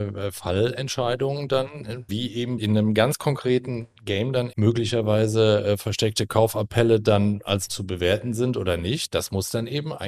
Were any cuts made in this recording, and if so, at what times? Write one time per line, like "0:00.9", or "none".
0:02.1
0:02.6
0:04.5
0:07.7